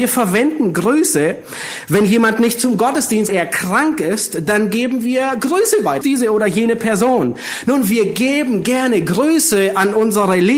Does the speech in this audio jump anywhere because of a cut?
yes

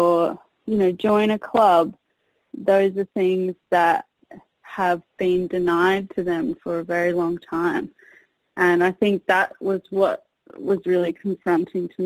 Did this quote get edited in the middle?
no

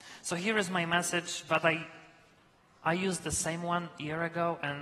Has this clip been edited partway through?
no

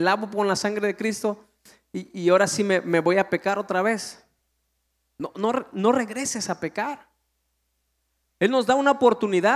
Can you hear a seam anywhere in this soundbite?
no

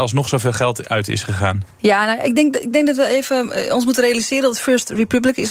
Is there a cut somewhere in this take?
no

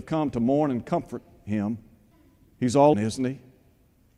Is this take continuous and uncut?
no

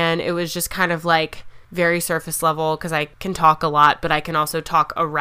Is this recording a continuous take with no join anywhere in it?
no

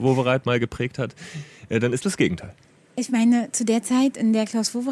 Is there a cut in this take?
yes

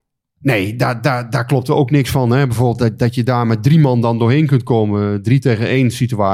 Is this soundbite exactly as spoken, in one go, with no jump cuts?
yes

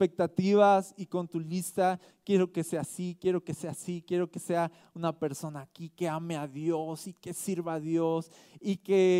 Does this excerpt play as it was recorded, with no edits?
yes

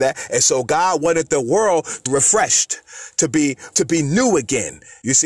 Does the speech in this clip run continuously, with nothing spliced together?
no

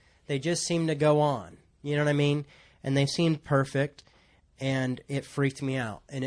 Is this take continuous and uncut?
yes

